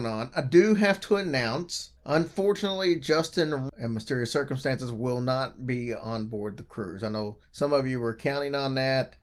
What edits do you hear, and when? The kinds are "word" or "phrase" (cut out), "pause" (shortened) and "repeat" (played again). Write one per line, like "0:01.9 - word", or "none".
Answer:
0:02.0 - pause
0:03.7 - word
0:07.4 - pause